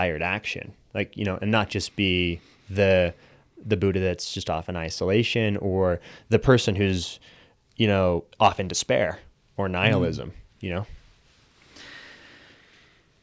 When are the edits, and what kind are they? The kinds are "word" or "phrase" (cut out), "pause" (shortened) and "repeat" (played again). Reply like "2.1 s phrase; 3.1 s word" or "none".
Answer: none